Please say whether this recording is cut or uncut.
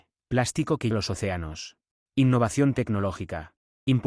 cut